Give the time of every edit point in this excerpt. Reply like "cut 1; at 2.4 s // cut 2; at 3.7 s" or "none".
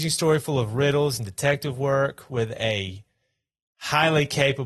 none